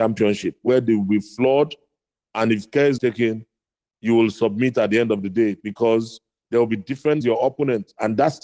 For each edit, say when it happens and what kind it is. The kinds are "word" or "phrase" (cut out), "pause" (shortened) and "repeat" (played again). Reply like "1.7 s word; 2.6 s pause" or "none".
3.0 s word; 7.2 s word